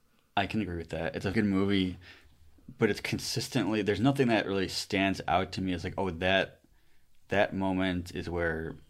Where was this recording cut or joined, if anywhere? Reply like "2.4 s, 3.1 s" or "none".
1.3 s